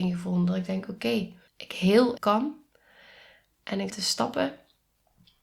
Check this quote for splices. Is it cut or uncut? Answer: cut